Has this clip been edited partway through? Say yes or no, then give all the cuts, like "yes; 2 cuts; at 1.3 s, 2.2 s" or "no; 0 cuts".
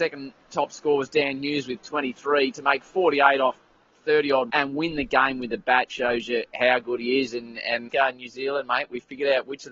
yes; 3 cuts; at 4.5 s, 5.9 s, 7.9 s